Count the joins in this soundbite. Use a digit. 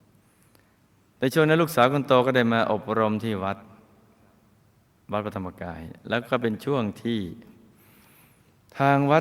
0